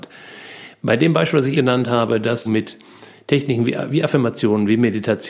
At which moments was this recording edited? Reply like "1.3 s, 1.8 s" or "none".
1.5 s, 2.4 s